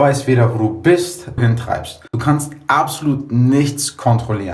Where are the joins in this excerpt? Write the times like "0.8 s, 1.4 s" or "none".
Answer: 1.4 s, 2.1 s